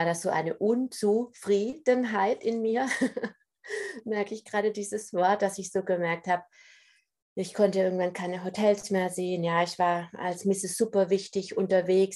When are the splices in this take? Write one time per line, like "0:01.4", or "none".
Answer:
none